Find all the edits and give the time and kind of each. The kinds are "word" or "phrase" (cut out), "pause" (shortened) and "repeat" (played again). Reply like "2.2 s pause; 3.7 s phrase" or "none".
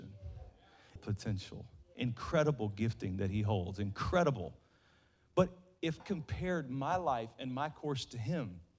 1.0 s word; 6.0 s word